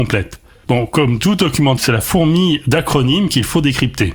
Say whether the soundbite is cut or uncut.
cut